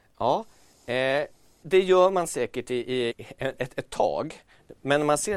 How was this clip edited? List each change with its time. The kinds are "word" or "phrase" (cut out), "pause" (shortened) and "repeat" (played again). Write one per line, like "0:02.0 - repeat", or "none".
0:01.6 - word
0:03.1 - word